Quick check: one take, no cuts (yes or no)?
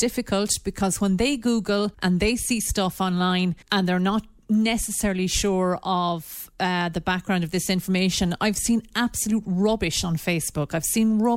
no